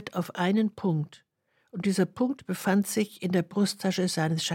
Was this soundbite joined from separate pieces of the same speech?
no; 0 cuts

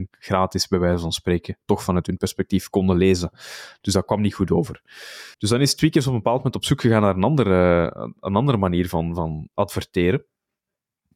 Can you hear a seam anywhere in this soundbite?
yes; 1 cut; at 5.3 s

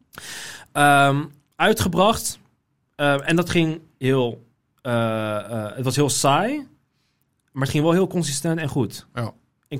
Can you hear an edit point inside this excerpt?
no; 0 cuts

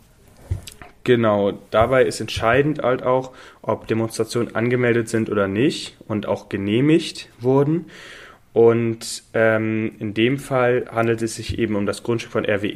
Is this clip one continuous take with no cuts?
yes; 0 cuts

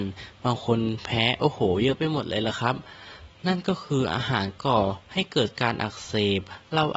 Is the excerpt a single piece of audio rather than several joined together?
no; 2 cuts; at 3.4 s, 5.0 s

